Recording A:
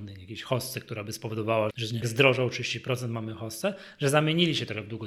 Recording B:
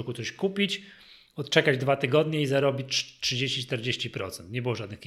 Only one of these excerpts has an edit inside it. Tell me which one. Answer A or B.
A